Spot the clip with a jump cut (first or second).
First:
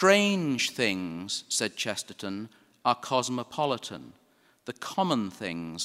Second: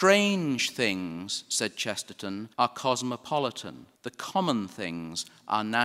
second